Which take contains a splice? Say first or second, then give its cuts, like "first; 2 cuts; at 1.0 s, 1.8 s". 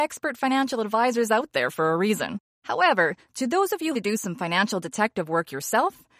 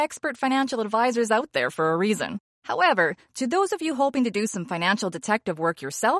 first; 1 cut; at 3.9 s